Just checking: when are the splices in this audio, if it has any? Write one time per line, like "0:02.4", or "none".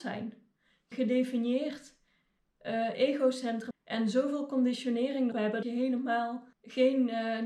0:00.9
0:03.7
0:05.3
0:05.6
0:06.5

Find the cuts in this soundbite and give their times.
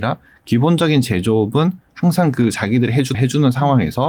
0:03.1

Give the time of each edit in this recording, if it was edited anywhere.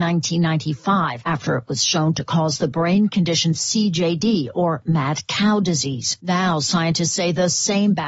none

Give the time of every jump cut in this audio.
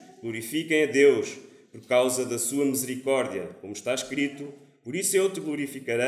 none

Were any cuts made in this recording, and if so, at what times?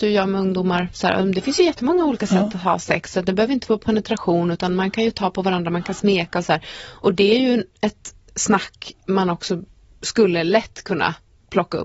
none

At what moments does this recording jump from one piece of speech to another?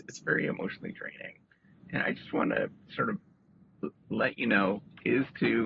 none

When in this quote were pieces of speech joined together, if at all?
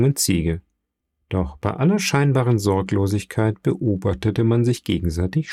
0:01.0

